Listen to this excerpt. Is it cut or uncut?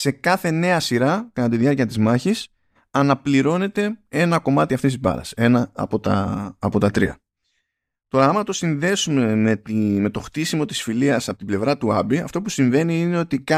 uncut